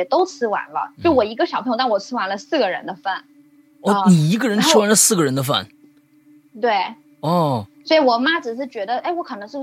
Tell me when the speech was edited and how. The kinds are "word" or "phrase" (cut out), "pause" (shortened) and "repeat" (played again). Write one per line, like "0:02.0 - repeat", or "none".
none